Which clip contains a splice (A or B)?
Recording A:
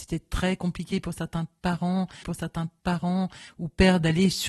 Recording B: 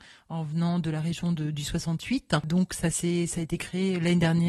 A